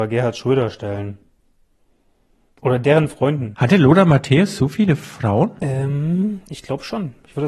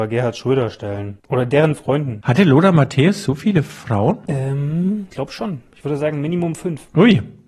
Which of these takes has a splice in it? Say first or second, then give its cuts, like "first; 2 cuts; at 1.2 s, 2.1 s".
second; 2 cuts; at 1.2 s, 5.1 s